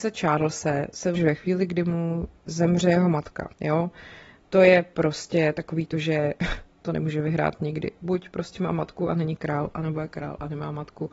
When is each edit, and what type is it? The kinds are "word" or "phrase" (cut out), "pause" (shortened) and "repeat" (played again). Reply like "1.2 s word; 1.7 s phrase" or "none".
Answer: 1.2 s phrase; 3.5 s pause